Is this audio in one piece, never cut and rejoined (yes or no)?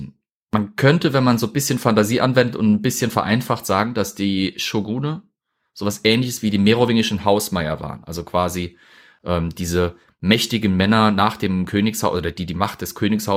yes